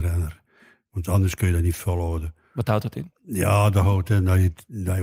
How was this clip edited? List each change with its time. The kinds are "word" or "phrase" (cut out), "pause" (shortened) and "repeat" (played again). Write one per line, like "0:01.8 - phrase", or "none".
none